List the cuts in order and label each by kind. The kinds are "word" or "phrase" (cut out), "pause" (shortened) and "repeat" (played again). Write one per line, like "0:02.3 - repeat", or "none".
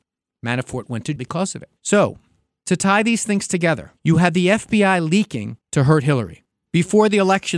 0:01.2 - word
0:01.8 - pause
0:04.0 - pause
0:05.6 - pause
0:06.5 - pause